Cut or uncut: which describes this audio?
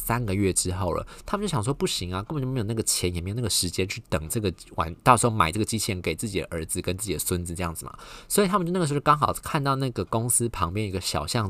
cut